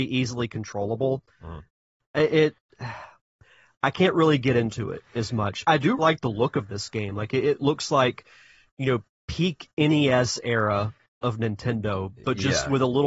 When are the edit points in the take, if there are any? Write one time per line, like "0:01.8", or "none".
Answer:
0:05.7
0:06.0